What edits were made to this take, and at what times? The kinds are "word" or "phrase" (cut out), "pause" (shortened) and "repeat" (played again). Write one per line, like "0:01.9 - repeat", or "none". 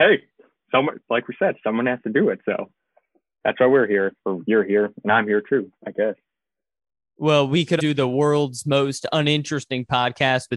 0:05.8 - pause
0:07.8 - word